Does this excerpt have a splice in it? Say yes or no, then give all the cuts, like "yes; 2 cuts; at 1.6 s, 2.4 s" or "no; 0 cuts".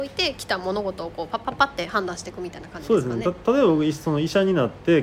no; 0 cuts